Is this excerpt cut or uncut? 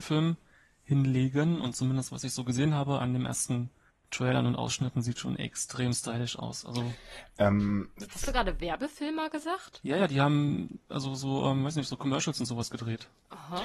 cut